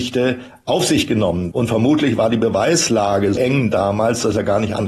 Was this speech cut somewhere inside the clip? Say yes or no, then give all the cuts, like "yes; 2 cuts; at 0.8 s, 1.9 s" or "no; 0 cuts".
yes; 2 cuts; at 1.5 s, 3.3 s